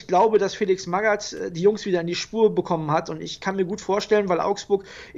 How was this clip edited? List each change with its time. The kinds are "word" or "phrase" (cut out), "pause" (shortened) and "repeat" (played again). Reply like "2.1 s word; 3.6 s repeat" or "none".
none